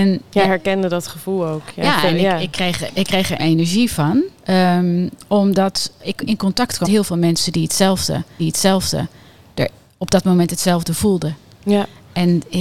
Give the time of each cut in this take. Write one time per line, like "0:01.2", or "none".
0:02.9
0:03.4
0:04.4
0:06.0
0:06.8
0:08.4